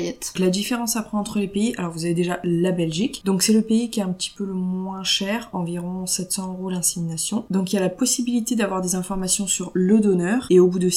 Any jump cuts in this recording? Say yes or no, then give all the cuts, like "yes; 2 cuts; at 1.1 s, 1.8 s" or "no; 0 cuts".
no; 0 cuts